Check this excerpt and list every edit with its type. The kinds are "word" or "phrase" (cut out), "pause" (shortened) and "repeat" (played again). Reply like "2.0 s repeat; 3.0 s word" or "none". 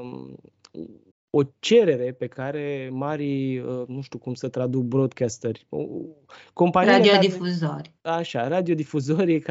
1.1 s pause; 8.0 s pause